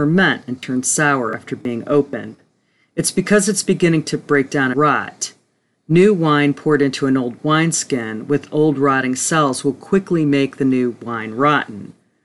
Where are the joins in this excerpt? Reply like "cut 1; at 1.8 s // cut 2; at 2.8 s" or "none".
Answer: cut 1; at 4.7 s